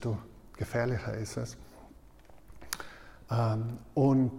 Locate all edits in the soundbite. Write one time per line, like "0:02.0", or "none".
none